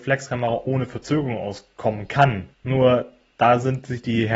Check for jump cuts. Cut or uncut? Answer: cut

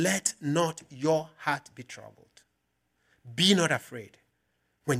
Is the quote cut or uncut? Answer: uncut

